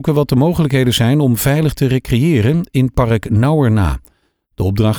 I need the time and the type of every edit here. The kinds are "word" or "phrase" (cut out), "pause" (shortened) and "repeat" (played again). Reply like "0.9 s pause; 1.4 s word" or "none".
none